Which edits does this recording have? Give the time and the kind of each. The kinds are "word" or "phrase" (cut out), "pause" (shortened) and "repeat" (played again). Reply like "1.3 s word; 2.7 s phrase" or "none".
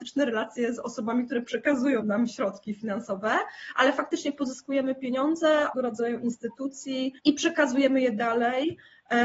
2.0 s word; 5.7 s phrase; 7.2 s pause